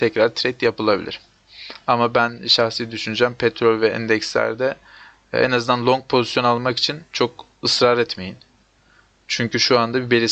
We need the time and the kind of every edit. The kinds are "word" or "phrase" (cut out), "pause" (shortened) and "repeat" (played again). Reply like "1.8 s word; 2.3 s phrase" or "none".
none